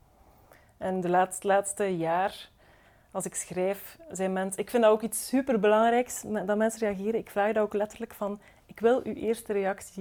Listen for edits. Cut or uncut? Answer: uncut